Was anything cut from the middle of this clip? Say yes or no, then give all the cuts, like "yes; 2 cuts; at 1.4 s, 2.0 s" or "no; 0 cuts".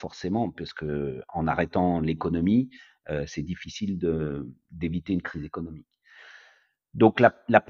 no; 0 cuts